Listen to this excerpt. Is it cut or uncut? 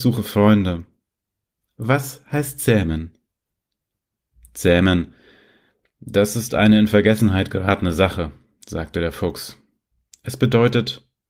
uncut